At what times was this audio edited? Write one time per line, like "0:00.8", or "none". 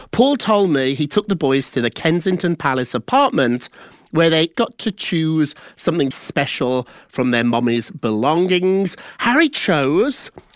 0:04.5
0:06.1